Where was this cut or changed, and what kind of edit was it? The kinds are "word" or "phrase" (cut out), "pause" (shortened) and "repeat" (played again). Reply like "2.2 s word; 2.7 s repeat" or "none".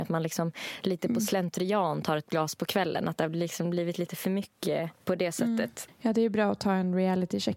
5.0 s pause